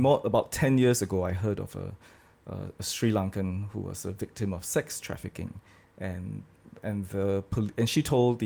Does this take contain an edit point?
no; 0 cuts

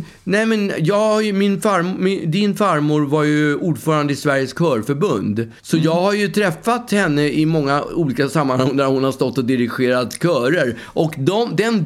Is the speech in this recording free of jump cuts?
no; 1 cut; at 5.6 s

